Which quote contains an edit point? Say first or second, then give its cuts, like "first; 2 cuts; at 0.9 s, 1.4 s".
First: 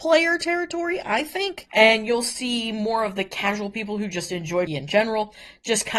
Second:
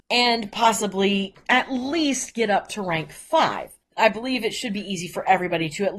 first; 1 cut; at 4.7 s